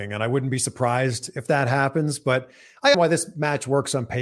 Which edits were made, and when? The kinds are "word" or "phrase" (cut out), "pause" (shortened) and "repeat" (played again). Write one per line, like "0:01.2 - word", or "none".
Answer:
0:02.9 - word

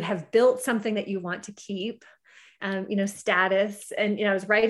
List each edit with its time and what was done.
none

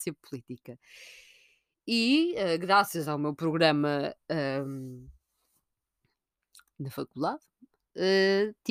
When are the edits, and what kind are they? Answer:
none

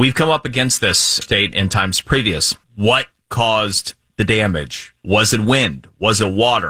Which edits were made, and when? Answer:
0:01.2 - phrase
0:01.5 - word
0:02.6 - pause
0:05.0 - pause

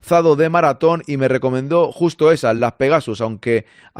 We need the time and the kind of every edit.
none

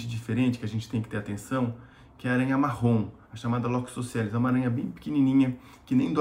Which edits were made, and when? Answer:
none

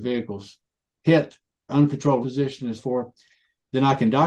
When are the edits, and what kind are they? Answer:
0:01.7 - word
0:02.2 - word
0:02.8 - word

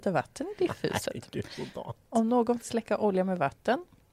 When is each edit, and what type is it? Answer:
0:02.6 - word

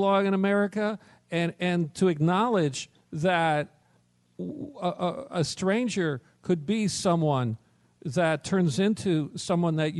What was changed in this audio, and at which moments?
none

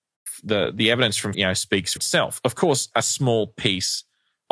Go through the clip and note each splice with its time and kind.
0:01.3 - word
0:02.0 - word
0:02.9 - word

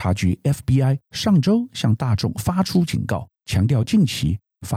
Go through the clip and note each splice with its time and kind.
0:01.1 - pause
0:03.4 - pause

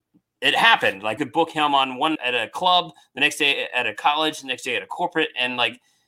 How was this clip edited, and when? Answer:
0:01.2 - word
0:02.1 - word

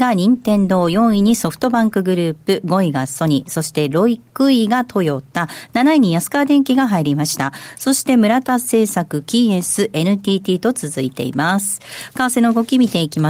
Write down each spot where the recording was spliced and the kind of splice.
none

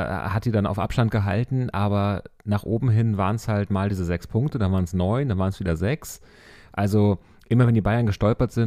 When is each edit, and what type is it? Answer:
none

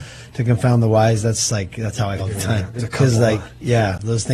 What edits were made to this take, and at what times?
0:01.5 - word
0:02.2 - word
0:02.8 - word

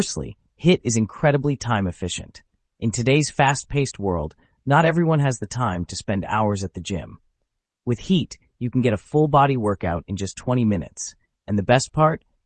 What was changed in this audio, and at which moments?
none

